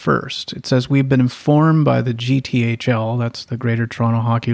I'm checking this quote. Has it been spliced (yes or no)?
no